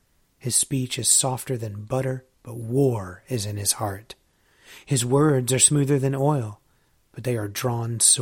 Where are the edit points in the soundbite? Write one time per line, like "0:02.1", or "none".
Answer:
0:02.3